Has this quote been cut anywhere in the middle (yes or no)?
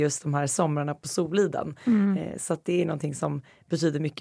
no